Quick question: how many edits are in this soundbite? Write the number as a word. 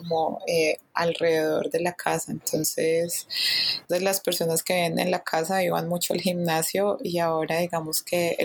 one